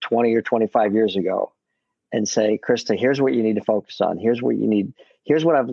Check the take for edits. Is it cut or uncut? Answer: uncut